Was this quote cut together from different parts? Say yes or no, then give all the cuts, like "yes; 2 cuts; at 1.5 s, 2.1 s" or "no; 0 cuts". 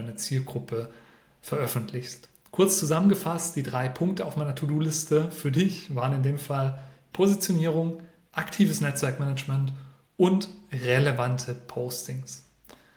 no; 0 cuts